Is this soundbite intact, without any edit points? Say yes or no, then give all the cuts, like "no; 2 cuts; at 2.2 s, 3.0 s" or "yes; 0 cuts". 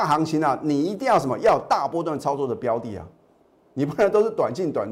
yes; 0 cuts